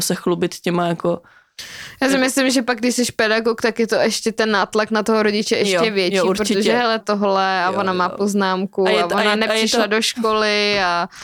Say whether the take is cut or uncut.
cut